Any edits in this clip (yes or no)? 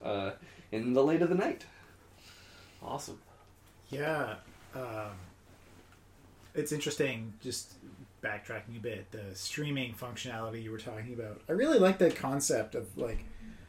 no